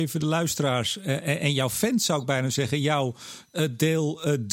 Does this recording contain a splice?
no; 0 cuts

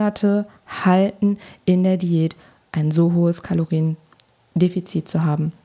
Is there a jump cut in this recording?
no; 0 cuts

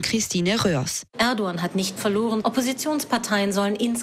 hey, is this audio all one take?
no; 1 cut; at 2.0 s

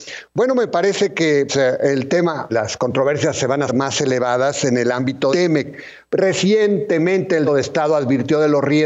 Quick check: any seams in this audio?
yes; 5 cuts; at 1.5 s, 2.5 s, 3.7 s, 5.3 s, 7.5 s

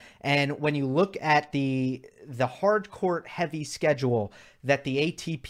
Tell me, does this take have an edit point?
no; 0 cuts

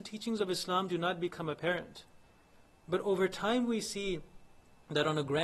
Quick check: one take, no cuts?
yes; 0 cuts

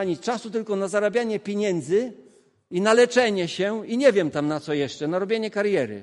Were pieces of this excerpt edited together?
no; 0 cuts

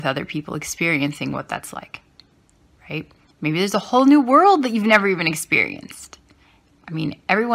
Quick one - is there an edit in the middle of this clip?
no; 0 cuts

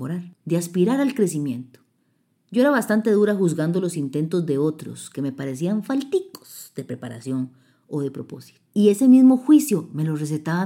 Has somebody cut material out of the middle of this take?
no; 0 cuts

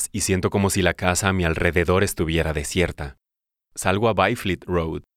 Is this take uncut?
yes; 0 cuts

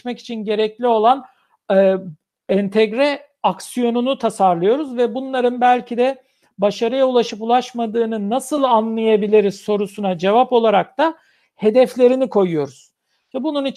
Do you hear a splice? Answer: no; 0 cuts

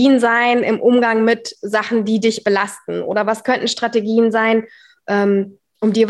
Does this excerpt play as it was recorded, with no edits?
yes; 0 cuts

